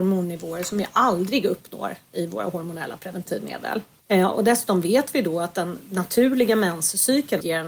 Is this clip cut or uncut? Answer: cut